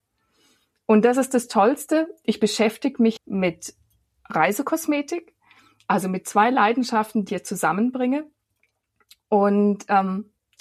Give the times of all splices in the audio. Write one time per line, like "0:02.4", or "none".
0:03.2
0:07.3